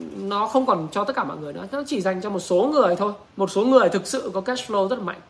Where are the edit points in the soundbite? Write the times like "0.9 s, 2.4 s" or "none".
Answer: 3.3 s